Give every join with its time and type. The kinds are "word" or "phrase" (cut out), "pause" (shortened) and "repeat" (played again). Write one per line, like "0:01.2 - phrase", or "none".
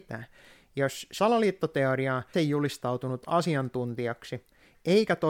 0:01.2 - word
0:02.3 - phrase